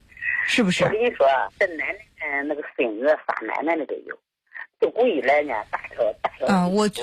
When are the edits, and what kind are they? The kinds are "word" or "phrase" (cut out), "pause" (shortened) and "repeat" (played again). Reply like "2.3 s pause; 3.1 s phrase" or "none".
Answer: 1.5 s word; 4.7 s pause